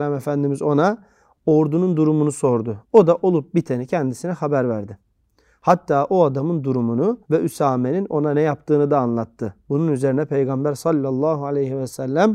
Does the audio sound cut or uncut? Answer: cut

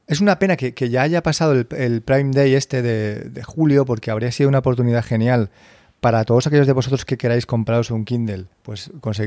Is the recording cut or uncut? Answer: uncut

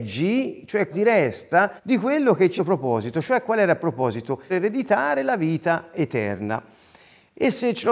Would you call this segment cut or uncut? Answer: cut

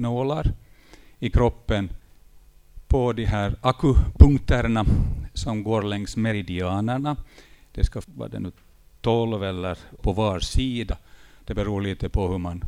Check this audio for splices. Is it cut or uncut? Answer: cut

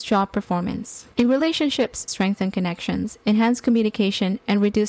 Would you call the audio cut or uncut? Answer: cut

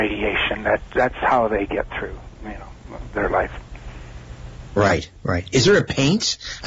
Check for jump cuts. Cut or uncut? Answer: uncut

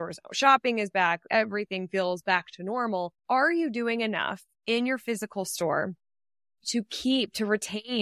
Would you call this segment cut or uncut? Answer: cut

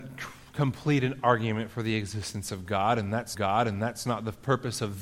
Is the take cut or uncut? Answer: cut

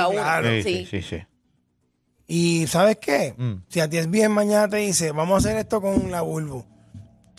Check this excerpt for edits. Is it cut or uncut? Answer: uncut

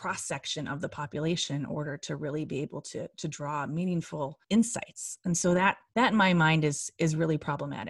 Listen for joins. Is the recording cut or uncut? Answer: cut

